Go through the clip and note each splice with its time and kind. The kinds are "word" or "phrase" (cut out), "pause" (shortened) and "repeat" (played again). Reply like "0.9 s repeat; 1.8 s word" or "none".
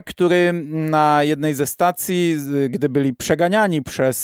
none